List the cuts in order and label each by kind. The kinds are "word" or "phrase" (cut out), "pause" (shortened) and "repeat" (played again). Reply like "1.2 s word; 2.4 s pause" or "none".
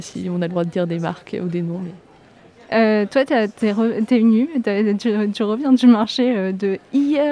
none